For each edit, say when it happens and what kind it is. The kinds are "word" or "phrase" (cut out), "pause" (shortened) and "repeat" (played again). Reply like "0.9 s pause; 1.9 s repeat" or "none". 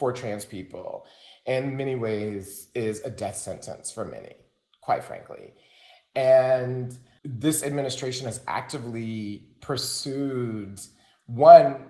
none